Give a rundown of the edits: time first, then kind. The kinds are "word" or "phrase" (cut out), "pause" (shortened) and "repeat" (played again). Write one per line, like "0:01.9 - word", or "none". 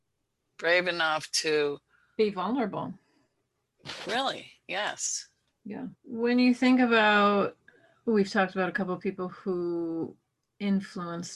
0:06.0 - pause